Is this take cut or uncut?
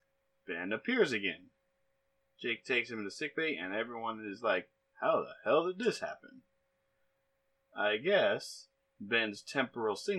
uncut